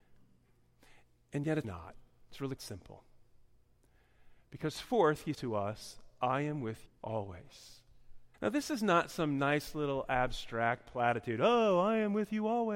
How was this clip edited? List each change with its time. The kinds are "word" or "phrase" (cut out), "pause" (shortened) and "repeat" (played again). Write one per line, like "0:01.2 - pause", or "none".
0:01.6 - word
0:02.6 - word
0:05.3 - word
0:06.9 - word
0:08.3 - pause